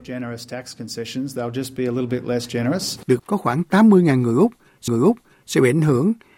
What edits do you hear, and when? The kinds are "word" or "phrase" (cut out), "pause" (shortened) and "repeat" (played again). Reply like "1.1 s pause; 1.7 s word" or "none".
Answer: 3.2 s word; 4.9 s repeat

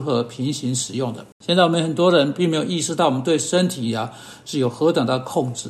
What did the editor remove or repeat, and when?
1.3 s pause

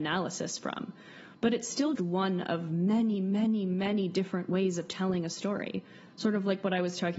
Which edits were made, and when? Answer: 1.9 s word

